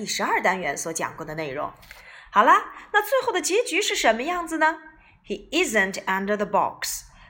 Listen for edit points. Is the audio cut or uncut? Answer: uncut